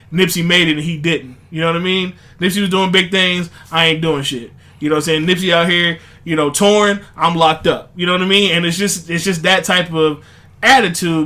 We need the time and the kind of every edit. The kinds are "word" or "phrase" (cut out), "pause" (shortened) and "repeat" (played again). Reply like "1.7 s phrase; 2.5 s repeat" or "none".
none